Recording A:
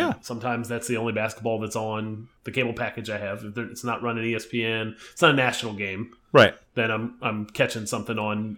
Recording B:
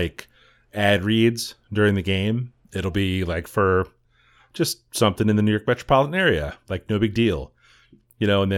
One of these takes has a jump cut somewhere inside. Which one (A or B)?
A